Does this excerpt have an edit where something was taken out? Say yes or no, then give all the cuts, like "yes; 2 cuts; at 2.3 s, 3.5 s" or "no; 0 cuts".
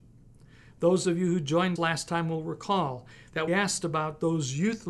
yes; 2 cuts; at 1.8 s, 3.5 s